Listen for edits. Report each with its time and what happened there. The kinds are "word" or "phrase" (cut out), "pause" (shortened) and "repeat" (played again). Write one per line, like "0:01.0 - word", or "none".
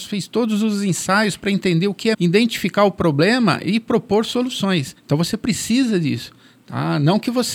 0:02.1 - word
0:05.0 - pause